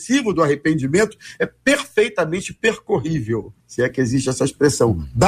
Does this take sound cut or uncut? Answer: cut